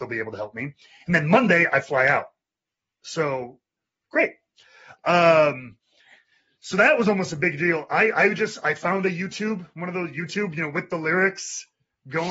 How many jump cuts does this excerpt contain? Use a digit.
0